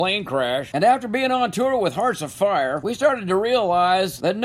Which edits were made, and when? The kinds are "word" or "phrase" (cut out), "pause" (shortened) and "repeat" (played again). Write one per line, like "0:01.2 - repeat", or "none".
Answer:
none

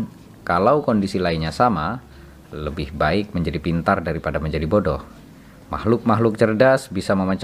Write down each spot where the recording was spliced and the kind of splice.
none

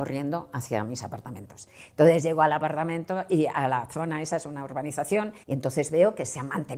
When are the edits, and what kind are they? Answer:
0:05.4 - pause

